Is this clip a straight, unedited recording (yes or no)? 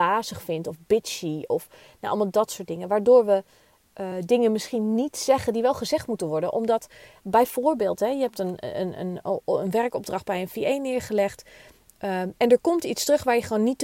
yes